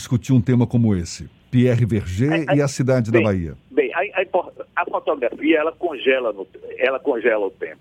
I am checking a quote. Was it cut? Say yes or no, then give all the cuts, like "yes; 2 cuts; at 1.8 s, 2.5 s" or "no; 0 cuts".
yes; 2 cuts; at 1.4 s, 3.6 s